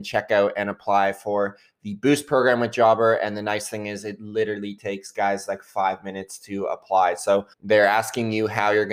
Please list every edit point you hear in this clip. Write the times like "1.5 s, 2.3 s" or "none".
7.5 s